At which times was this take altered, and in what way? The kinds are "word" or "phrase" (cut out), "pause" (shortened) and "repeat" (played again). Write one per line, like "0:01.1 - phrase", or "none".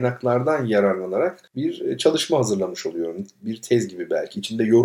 0:01.5 - pause